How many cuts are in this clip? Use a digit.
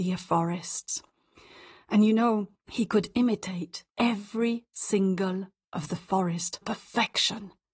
4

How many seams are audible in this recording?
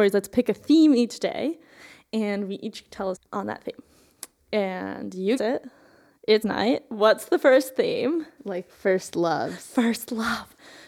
3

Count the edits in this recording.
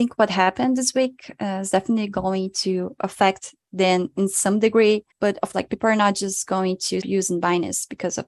3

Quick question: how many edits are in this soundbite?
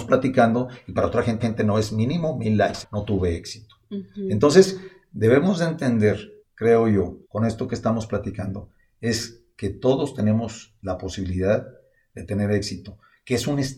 4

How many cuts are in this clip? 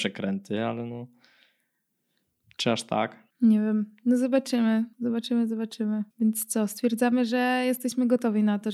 3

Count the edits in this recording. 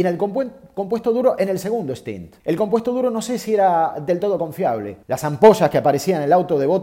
2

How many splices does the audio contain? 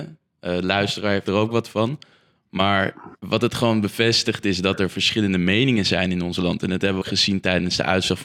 2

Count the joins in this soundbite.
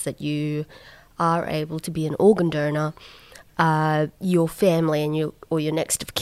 1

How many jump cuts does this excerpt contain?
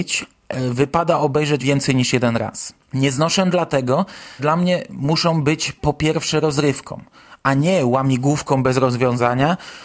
4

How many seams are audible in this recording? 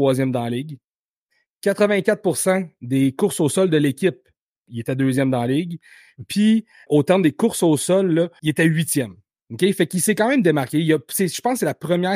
2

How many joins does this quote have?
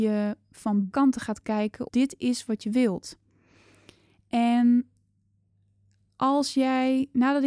2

